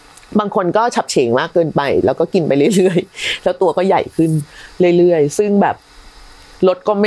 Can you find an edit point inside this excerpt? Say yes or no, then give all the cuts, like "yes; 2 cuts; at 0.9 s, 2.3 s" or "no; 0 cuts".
no; 0 cuts